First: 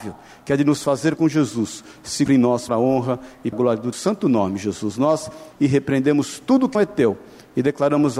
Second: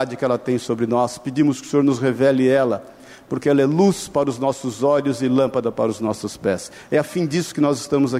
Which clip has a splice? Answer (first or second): first